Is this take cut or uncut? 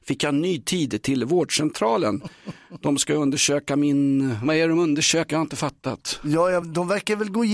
uncut